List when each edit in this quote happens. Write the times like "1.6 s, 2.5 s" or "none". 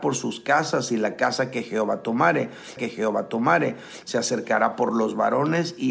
2.8 s